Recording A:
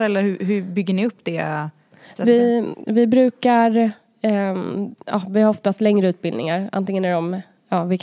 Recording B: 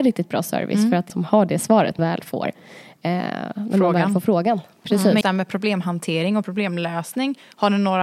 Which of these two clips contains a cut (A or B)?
B